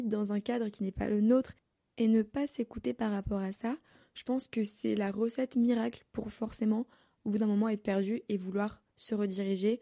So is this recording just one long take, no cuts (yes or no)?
yes